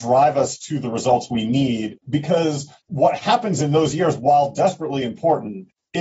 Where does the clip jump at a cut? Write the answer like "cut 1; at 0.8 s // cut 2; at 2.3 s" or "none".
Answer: cut 1; at 2.8 s